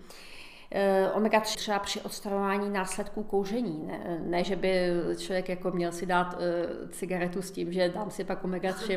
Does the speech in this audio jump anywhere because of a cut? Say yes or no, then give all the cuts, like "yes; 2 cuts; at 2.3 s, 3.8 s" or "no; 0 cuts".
yes; 1 cut; at 1.5 s